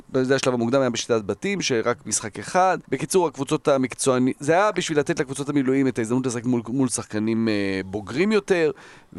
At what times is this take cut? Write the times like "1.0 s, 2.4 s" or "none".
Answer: 2.8 s